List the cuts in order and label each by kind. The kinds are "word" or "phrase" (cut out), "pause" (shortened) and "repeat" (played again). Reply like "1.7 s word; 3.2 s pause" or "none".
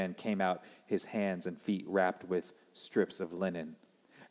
none